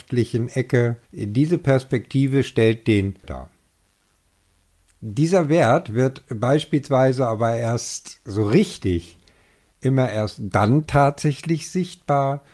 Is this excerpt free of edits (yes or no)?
no